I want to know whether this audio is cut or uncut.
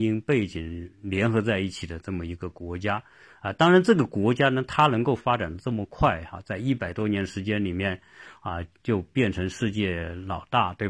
uncut